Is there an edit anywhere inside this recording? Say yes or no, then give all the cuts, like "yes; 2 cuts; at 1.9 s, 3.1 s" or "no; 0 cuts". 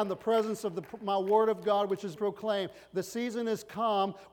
yes; 1 cut; at 2.2 s